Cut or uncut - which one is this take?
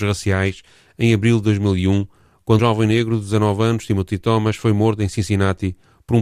cut